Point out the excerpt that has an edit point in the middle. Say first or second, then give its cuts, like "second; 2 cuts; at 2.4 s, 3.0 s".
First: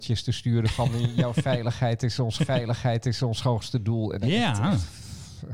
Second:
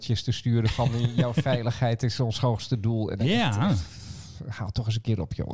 first; 1 cut; at 2.4 s